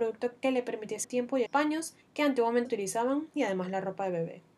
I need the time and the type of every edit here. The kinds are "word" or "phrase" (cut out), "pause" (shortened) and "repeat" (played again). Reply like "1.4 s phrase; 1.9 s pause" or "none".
1.0 s word; 1.5 s phrase; 2.0 s pause; 2.7 s word